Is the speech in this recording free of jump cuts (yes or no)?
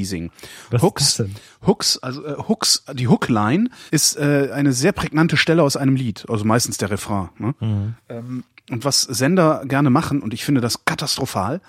no